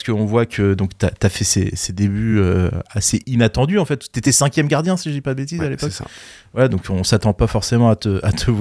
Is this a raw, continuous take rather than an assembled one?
yes; 0 cuts

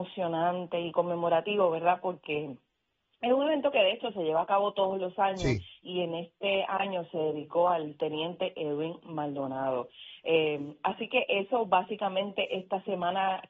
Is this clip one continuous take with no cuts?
yes; 0 cuts

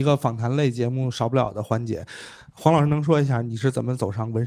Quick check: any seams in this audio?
no; 0 cuts

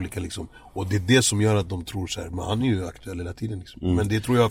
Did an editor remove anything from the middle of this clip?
no; 0 cuts

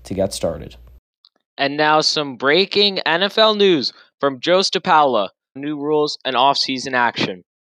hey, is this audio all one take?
no; 1 cut; at 5.6 s

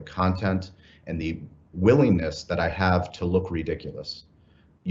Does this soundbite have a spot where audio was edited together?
no; 0 cuts

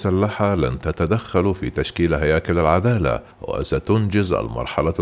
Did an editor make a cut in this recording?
yes; 1 cut; at 3.3 s

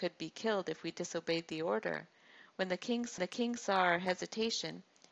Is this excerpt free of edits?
no; 1 cut; at 3.2 s

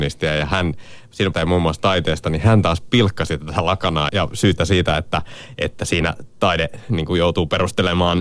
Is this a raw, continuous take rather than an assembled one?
no; 3 cuts; at 1.3 s, 4.1 s, 4.6 s

